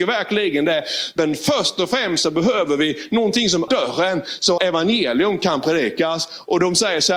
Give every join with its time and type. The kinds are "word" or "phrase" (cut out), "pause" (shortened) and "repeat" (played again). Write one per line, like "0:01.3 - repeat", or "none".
0:03.7 - word
0:04.6 - word